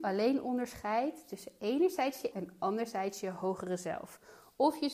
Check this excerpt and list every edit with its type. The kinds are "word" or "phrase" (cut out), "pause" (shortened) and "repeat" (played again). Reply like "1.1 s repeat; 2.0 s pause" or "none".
2.3 s word